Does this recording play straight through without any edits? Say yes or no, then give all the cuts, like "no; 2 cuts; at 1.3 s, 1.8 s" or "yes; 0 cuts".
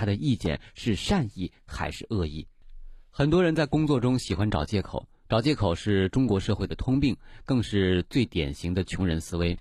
yes; 0 cuts